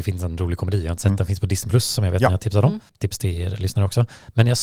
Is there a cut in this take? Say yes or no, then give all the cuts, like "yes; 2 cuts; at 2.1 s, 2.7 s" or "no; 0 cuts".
yes; 1 cut; at 2.9 s